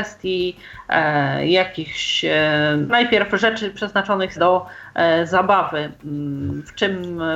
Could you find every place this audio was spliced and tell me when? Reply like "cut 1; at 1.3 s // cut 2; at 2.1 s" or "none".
cut 1; at 2.9 s // cut 2; at 4.4 s